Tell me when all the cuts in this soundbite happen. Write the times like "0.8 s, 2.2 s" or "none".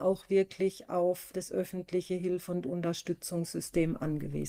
1.3 s